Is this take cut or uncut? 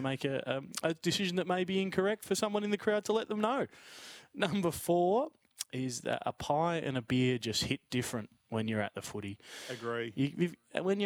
uncut